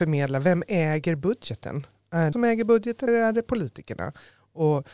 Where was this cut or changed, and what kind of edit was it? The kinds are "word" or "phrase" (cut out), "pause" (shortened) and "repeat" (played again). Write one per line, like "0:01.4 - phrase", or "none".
0:02.3 - phrase
0:03.1 - word